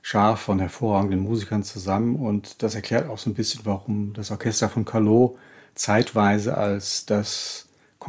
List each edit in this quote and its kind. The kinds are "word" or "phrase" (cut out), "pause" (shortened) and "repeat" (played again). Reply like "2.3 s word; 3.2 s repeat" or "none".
none